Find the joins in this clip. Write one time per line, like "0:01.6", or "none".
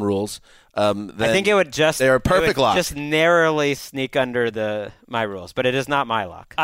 none